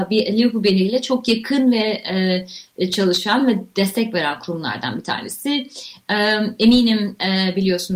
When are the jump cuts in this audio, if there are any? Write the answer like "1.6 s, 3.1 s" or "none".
none